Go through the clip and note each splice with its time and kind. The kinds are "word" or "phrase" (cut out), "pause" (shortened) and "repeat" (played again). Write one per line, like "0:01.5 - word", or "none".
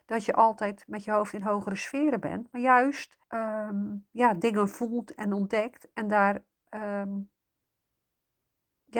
0:03.2 - pause